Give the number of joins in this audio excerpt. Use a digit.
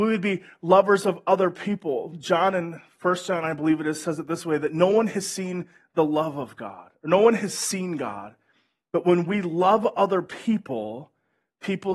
0